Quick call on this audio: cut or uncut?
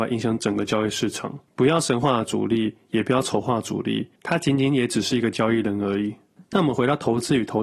cut